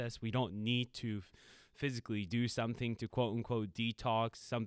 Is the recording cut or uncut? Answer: uncut